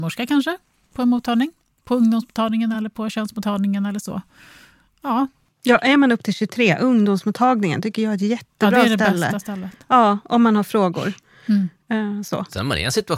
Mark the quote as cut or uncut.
uncut